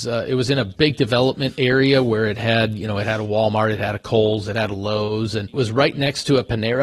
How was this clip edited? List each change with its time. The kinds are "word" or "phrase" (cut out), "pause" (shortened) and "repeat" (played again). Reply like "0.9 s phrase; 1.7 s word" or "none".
5.5 s word